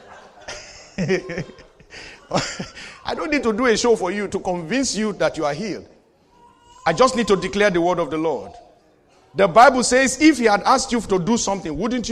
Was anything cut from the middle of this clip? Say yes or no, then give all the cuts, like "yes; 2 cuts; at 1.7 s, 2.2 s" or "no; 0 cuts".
no; 0 cuts